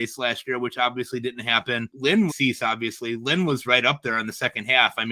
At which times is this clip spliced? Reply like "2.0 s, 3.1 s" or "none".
2.3 s, 3.6 s